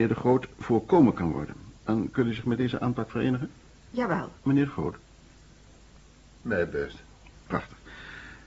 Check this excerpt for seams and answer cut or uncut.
cut